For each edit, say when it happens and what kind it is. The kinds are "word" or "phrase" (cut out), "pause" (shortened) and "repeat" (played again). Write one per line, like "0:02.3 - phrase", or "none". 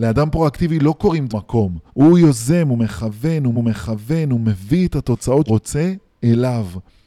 0:01.3 - phrase
0:01.9 - pause
0:03.5 - repeat
0:05.5 - word